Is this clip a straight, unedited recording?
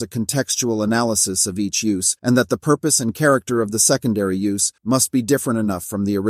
no; 2 cuts; at 2.2 s, 4.8 s

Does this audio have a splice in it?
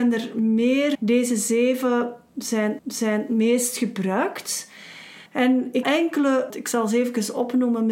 yes; 5 cuts; at 0.9 s, 2.8 s, 5.3 s, 5.8 s, 6.5 s

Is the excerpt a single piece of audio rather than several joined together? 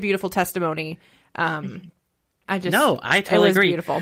no; 1 cut; at 2.5 s

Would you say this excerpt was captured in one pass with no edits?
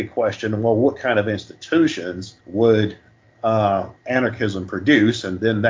no; 2 cuts; at 2.4 s, 4.0 s

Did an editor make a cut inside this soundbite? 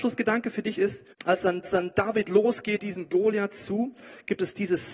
yes; 3 cuts; at 1.1 s, 1.6 s, 2.8 s

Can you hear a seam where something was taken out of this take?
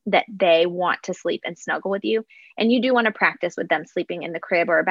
no; 0 cuts

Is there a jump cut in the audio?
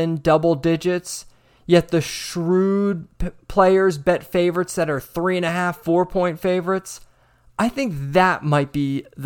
no; 0 cuts

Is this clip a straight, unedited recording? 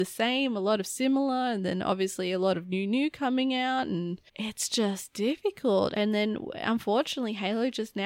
no; 1 cut; at 4.3 s

